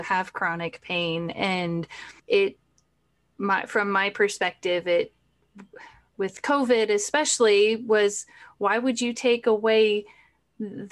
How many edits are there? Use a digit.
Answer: 1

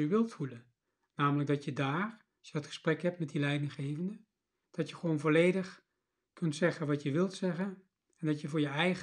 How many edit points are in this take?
0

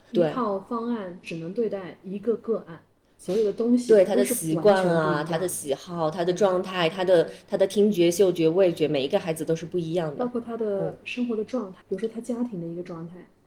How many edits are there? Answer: 1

